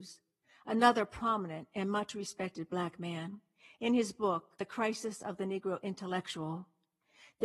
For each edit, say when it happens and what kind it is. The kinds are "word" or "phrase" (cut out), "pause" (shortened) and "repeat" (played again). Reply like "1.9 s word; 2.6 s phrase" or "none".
4.5 s pause